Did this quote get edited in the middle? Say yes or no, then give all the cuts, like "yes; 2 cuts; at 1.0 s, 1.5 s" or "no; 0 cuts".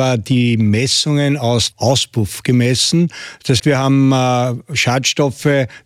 yes; 2 cuts; at 1.7 s, 3.6 s